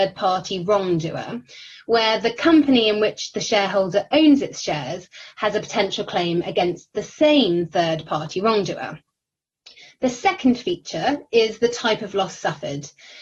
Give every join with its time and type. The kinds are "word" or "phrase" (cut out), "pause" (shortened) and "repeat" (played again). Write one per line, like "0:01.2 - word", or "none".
none